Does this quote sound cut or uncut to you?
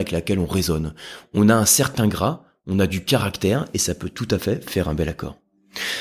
uncut